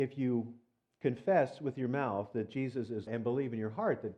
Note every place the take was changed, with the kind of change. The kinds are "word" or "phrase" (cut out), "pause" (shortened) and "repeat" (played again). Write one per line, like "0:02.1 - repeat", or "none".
0:03.1 - word